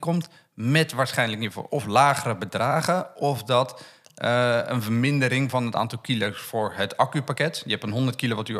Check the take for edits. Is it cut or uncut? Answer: uncut